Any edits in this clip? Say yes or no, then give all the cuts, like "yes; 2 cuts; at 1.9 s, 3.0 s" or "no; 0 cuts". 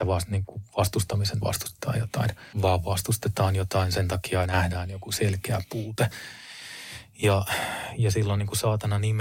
yes; 3 cuts; at 1.4 s, 2.5 s, 4.5 s